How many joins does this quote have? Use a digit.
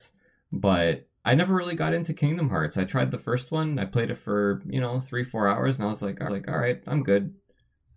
2